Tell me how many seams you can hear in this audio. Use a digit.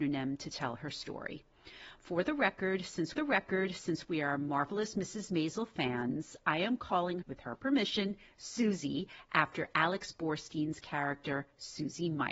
2